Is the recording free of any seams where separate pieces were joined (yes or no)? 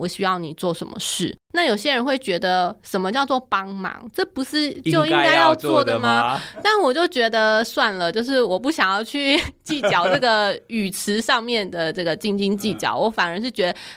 no